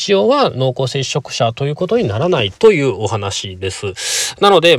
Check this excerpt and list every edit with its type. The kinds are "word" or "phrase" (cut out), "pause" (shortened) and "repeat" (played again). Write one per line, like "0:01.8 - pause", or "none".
0:02.6 - pause